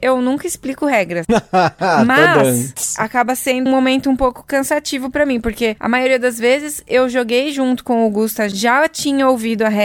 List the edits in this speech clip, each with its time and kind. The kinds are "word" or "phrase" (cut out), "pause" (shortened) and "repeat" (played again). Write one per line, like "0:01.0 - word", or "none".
0:03.7 - word
0:08.5 - word

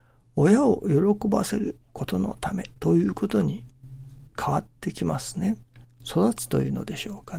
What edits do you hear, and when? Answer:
0:02.8 - pause
0:04.3 - pause

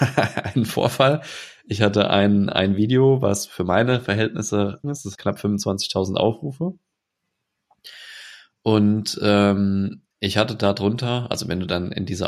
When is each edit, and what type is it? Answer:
0:04.8 - phrase
0:05.1 - word
0:10.1 - pause

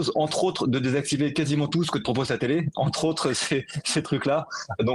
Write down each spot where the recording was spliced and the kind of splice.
none

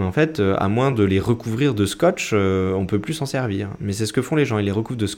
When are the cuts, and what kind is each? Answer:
none

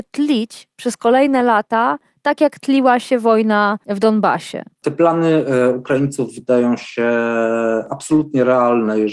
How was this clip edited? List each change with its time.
none

